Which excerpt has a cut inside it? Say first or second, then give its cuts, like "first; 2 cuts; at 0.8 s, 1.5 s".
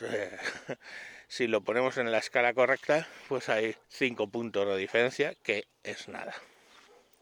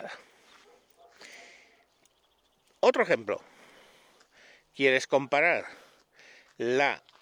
first; 1 cut; at 3.8 s